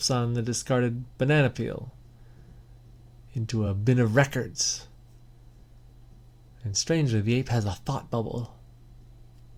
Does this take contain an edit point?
no; 0 cuts

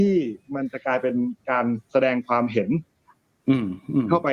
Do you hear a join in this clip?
no; 0 cuts

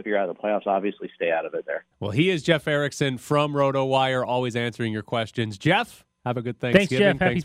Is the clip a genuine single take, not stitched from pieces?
no; 1 cut; at 1.9 s

